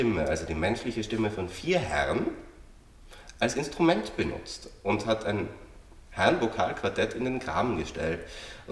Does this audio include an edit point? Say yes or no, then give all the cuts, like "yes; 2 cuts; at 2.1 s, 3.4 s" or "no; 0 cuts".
no; 0 cuts